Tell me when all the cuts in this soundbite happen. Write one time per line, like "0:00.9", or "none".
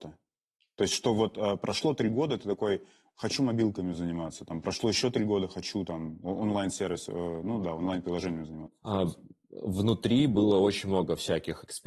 none

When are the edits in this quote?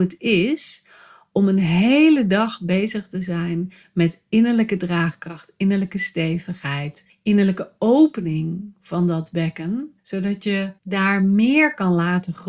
0:07.1
0:10.0
0:10.8

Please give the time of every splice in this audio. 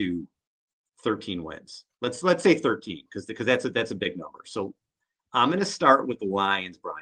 none

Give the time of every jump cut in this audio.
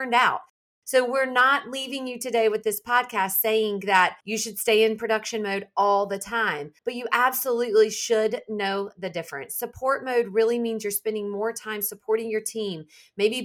0:04.2
0:06.8

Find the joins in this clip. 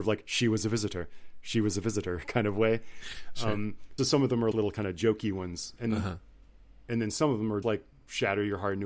0:04.0
0:04.5
0:05.9
0:07.6

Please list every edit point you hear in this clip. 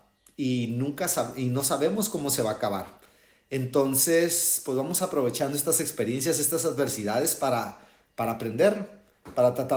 none

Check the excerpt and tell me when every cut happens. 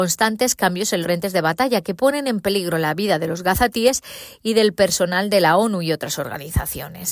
0:01.0

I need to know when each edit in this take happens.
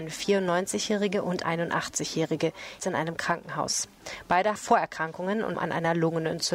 0:01.4
0:02.8
0:04.6
0:05.5

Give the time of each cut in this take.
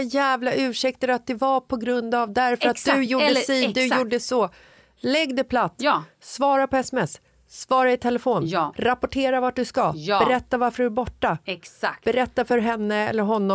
none

